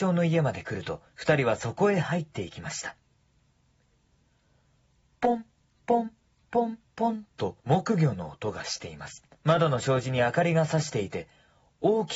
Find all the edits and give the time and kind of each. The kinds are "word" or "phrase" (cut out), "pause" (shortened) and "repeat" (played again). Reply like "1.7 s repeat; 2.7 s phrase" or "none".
1.1 s pause; 6.9 s pause; 7.6 s pause; 9.3 s pause